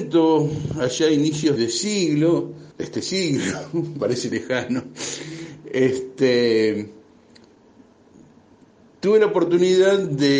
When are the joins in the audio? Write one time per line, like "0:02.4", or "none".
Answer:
0:01.6
0:02.7
0:04.3